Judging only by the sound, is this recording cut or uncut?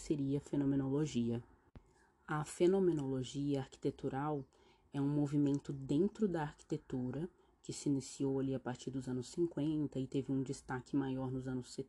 uncut